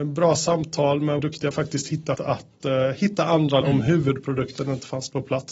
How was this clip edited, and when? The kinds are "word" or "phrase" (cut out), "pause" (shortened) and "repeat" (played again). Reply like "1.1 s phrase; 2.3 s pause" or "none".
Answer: 1.2 s word; 1.5 s word; 2.1 s word; 3.6 s word